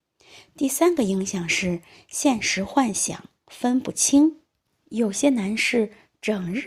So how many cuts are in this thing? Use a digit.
0